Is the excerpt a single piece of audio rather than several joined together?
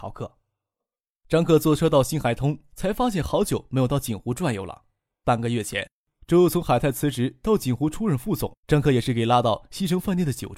no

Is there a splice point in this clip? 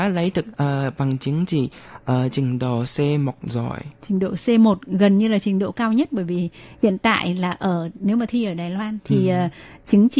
no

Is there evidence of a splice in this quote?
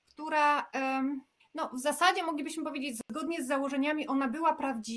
yes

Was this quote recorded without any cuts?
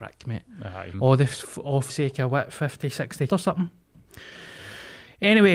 no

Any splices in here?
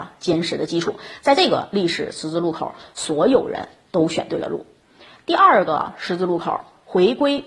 no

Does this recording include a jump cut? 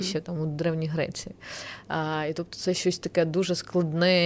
no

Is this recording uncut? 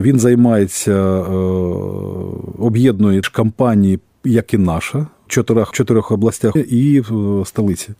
no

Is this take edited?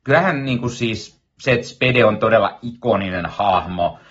no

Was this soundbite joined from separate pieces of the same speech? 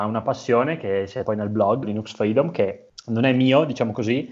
yes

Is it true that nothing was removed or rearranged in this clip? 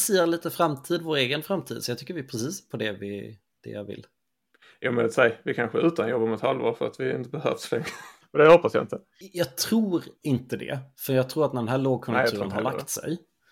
no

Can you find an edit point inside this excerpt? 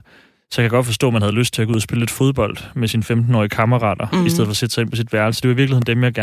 no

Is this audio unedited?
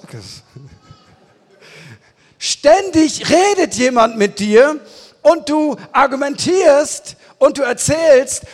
yes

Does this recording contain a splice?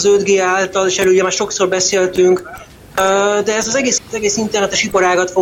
yes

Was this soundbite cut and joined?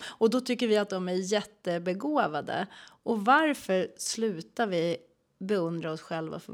no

